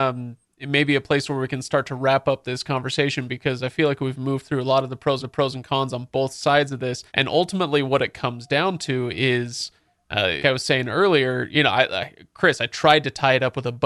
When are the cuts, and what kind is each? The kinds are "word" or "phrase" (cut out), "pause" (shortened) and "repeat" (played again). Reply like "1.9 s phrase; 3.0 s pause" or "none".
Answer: 5.2 s repeat; 7.1 s pause; 10.4 s word